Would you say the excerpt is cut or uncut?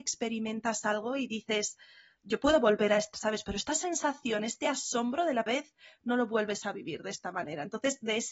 cut